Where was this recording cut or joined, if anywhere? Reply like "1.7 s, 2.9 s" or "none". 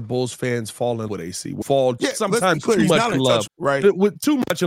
1.1 s, 1.6 s, 2.0 s, 3.5 s